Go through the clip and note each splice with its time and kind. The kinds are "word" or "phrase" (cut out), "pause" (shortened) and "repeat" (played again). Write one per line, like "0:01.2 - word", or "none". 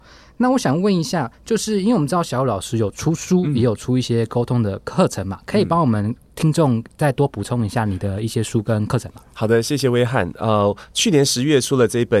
0:01.3 - pause